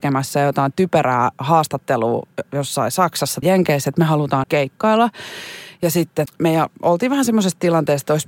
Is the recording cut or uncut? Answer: cut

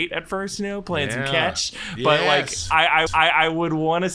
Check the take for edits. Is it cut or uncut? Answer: cut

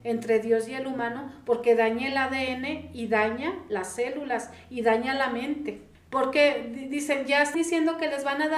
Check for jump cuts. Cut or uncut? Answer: cut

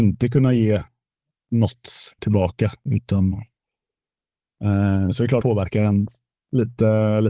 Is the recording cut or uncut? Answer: cut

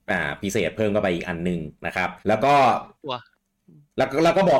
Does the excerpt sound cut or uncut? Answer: cut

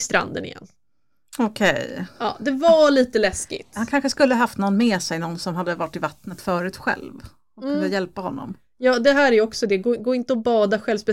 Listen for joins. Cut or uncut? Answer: uncut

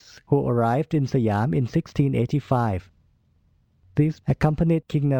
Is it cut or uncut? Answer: cut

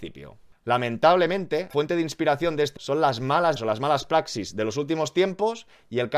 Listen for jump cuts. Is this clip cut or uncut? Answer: cut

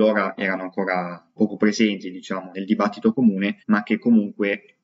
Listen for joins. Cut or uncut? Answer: cut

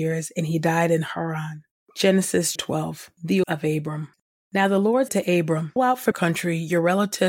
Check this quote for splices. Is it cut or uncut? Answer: cut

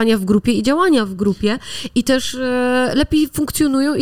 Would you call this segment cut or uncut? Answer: uncut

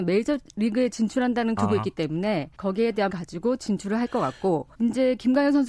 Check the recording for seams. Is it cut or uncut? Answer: cut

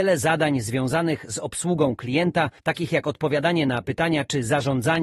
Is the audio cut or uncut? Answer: cut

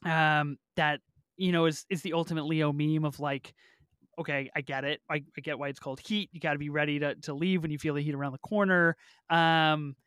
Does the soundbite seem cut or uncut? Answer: uncut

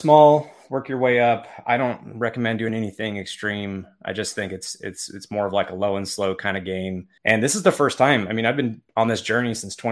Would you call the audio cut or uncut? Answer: cut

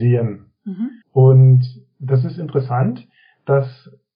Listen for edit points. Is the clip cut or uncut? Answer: cut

